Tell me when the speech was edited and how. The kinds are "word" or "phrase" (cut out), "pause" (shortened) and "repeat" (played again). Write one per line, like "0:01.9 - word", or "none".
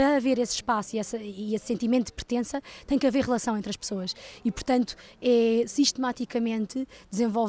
none